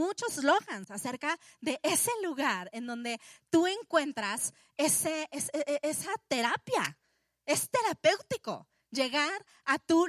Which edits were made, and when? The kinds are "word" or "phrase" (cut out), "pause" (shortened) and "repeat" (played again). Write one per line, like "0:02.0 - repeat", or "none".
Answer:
none